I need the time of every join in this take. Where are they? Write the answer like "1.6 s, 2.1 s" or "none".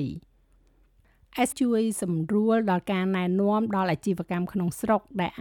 1.5 s